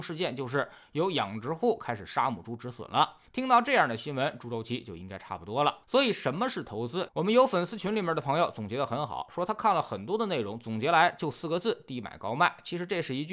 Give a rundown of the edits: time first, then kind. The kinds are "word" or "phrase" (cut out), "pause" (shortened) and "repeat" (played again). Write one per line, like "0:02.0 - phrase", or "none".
0:03.3 - pause
0:05.8 - pause